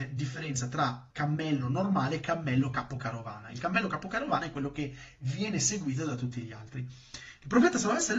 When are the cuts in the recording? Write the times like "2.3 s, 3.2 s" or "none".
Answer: 1.1 s